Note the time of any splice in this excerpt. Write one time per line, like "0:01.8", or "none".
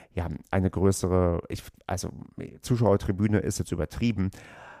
none